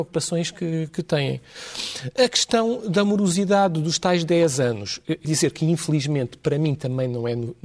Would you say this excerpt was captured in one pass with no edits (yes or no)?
no